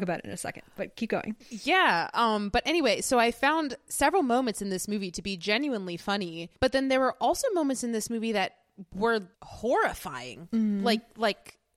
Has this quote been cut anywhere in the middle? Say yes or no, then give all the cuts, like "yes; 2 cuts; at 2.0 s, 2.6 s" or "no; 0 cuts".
yes; 3 cuts; at 1.4 s, 6.6 s, 9.3 s